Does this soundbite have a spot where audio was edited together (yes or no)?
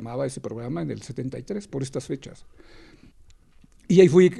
yes